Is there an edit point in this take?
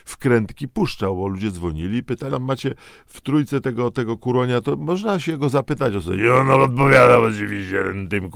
yes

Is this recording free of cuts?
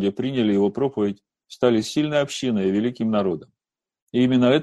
yes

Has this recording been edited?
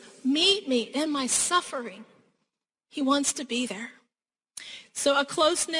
no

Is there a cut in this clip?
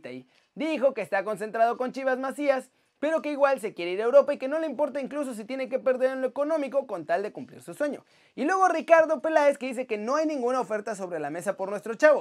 no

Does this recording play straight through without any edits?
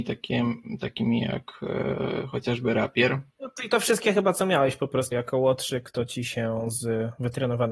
no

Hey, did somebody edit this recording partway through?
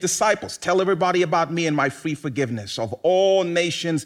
no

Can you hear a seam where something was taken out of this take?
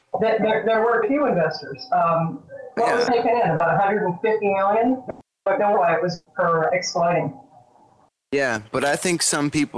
yes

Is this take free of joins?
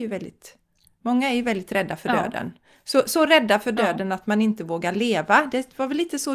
yes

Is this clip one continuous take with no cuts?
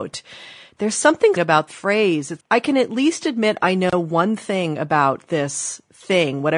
no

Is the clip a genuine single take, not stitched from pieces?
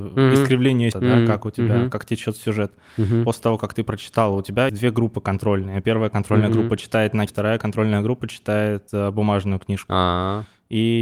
no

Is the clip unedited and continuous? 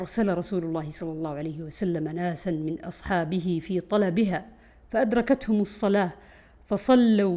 yes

